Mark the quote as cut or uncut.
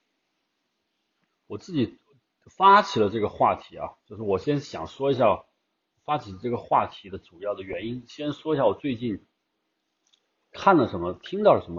uncut